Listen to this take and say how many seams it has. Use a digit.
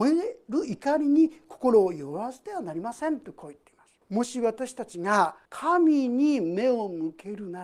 2